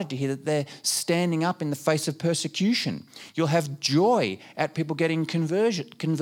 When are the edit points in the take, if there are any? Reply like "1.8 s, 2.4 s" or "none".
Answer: none